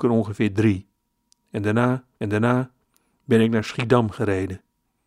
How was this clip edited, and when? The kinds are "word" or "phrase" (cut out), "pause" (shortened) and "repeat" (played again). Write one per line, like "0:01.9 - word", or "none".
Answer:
0:02.2 - repeat